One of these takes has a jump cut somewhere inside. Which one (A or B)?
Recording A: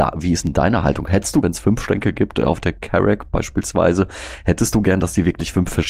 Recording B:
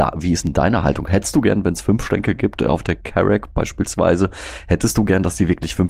A